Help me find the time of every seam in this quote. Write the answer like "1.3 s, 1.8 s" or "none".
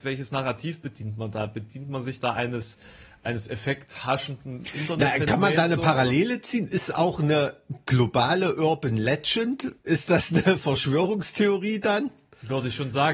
9.8 s